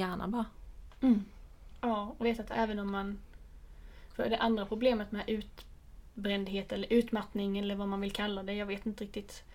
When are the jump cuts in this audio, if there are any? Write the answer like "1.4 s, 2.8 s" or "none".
2.2 s